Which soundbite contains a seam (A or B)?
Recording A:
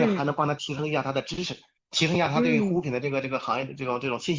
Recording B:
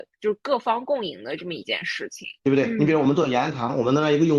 B